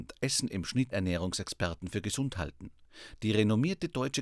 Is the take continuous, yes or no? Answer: no